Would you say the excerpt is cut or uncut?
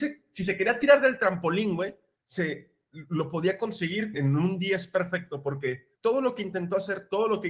cut